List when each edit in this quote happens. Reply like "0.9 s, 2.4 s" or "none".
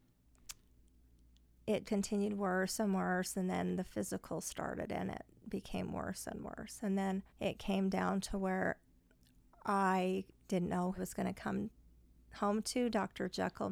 1.8 s, 7.3 s, 11.0 s